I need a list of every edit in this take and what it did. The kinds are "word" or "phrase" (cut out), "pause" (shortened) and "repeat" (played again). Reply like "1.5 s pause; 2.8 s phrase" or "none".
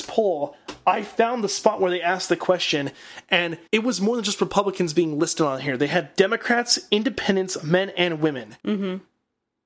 3.7 s pause; 8.6 s pause